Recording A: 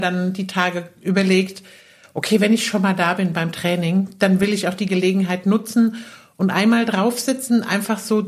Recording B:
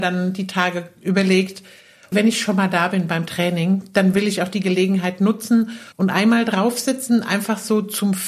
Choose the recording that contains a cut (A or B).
B